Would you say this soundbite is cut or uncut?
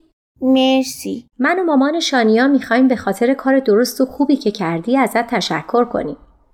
cut